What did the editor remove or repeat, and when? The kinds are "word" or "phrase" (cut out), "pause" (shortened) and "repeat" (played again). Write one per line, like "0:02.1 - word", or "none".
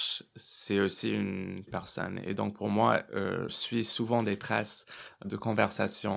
0:01.7 - phrase
0:03.5 - word
0:05.2 - word